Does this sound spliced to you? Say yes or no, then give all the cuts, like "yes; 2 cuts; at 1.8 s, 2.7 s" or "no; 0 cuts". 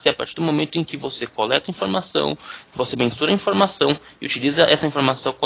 no; 0 cuts